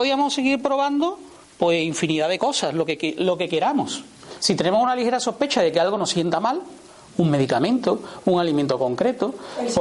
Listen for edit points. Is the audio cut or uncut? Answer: uncut